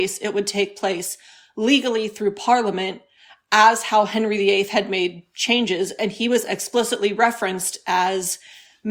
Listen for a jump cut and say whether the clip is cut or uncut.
uncut